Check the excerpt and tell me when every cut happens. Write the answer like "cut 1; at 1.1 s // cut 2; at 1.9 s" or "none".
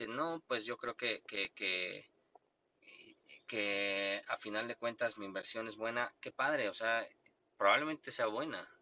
none